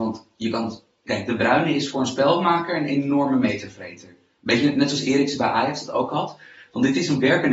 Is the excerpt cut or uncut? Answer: uncut